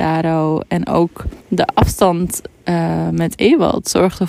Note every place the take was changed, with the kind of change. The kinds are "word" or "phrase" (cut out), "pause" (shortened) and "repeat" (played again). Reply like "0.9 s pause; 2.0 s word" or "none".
1.4 s pause